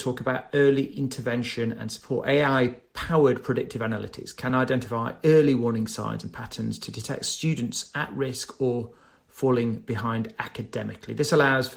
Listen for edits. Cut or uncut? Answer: uncut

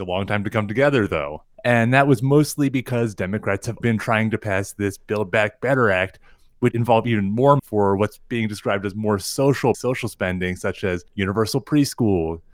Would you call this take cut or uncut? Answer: cut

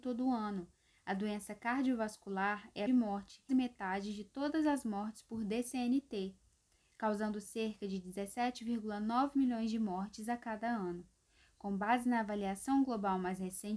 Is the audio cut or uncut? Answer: cut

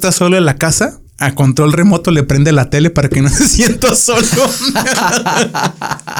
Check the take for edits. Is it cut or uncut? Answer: cut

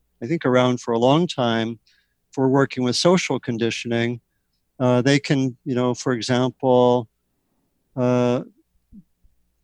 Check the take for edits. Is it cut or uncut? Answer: uncut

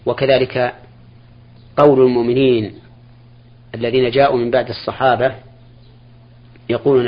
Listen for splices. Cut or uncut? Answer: uncut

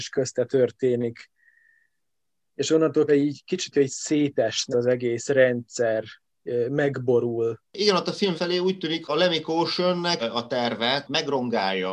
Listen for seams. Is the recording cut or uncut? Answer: cut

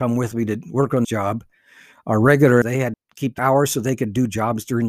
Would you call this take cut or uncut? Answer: cut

